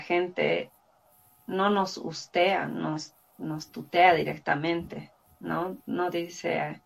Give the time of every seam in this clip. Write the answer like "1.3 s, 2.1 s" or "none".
none